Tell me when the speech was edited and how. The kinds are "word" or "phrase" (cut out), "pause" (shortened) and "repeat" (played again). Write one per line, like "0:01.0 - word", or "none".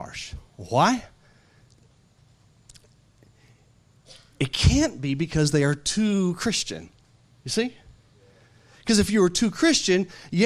none